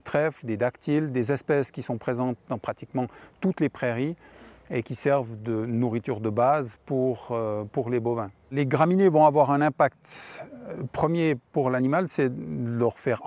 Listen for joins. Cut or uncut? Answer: uncut